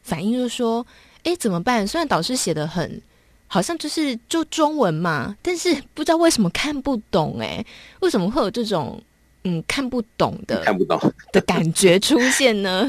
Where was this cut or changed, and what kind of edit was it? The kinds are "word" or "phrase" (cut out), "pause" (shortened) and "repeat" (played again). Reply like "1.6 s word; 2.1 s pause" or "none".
none